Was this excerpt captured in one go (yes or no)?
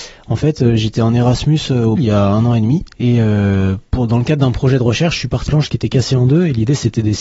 no